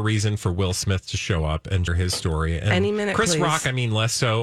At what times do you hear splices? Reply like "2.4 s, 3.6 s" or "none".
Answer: 1.9 s